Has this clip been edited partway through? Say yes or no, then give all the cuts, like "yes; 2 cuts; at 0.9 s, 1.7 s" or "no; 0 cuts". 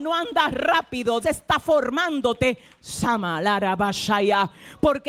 yes; 1 cut; at 1.2 s